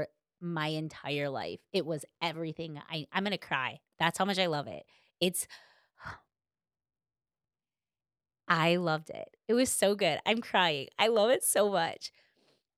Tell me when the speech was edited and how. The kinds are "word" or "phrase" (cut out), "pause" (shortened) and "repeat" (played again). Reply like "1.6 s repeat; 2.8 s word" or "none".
none